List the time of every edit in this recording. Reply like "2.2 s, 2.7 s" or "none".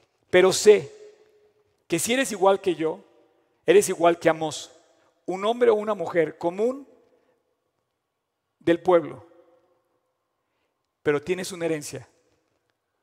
none